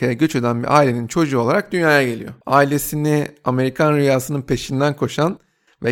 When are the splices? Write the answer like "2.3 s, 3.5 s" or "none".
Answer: 2.4 s